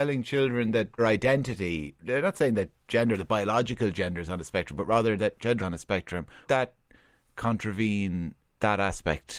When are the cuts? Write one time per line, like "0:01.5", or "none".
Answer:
0:01.0
0:05.6
0:06.5